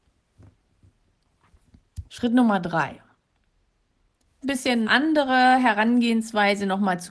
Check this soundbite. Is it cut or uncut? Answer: cut